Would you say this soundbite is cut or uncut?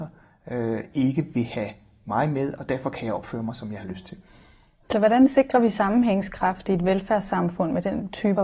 uncut